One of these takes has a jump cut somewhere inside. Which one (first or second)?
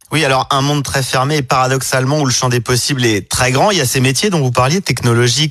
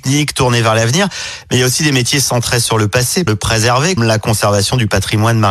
second